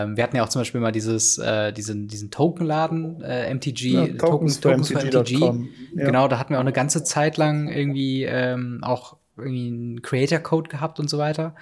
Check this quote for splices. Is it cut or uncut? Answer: uncut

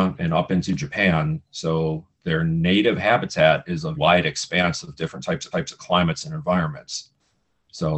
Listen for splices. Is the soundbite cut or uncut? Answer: cut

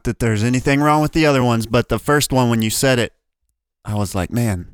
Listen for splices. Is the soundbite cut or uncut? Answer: uncut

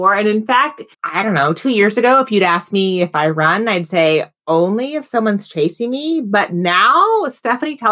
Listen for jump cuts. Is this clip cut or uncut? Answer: cut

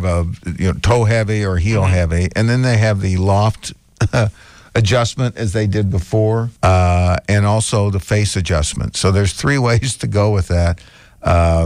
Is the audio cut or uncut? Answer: cut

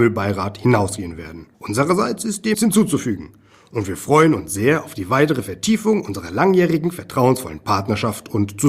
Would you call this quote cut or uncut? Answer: cut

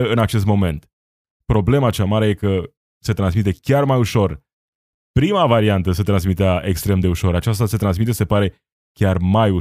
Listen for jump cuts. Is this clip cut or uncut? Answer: uncut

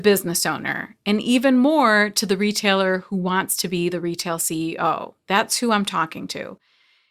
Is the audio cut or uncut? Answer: uncut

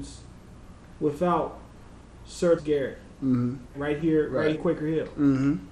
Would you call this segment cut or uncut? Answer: cut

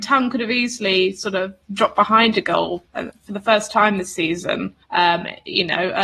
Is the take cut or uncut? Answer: cut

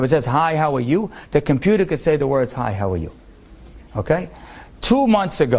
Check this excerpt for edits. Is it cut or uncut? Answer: uncut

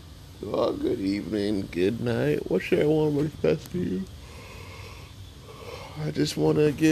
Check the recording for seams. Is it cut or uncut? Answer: uncut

